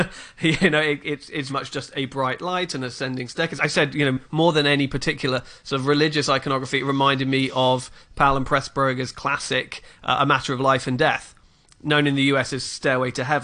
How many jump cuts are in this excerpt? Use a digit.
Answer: 2